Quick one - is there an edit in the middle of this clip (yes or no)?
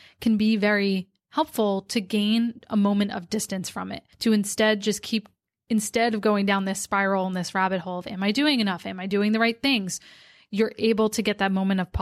yes